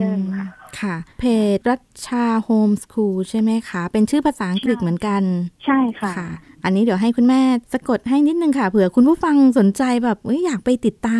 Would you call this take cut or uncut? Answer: cut